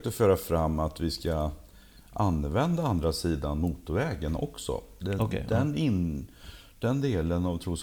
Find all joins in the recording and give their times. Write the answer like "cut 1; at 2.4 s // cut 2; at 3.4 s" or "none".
none

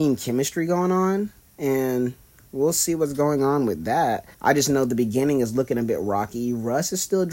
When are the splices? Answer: cut 1; at 4.3 s

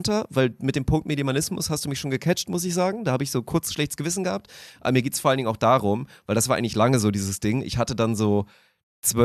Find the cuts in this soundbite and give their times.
none

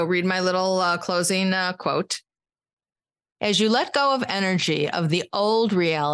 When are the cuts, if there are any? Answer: none

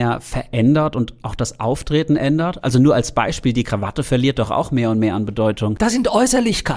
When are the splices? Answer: none

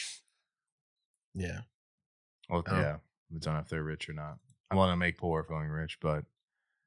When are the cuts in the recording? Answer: cut 1; at 2.7 s // cut 2; at 3.4 s // cut 3; at 4.7 s // cut 4; at 5.2 s // cut 5; at 5.5 s

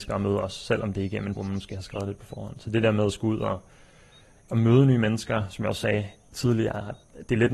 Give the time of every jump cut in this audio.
cut 1; at 1.4 s

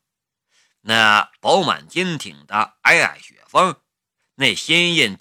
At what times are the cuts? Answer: none

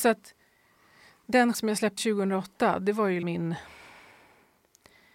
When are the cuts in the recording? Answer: cut 1; at 1.5 s // cut 2; at 2.0 s // cut 3; at 3.2 s

